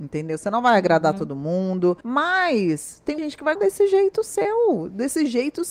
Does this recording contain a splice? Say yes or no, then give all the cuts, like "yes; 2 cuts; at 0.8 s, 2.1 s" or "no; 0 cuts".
yes; 3 cuts; at 2.0 s, 3.2 s, 3.6 s